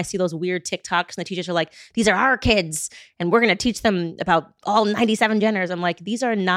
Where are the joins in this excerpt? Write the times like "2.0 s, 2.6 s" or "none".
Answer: none